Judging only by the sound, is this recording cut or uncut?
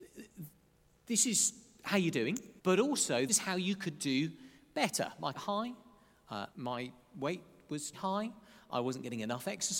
cut